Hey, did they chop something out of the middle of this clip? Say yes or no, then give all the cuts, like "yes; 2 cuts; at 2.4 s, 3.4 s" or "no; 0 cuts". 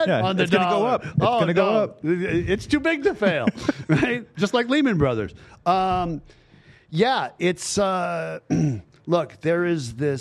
no; 0 cuts